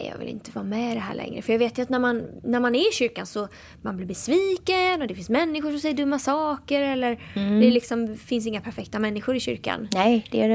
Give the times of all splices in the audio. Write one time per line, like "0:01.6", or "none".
none